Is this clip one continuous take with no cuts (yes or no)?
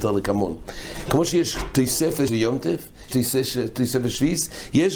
no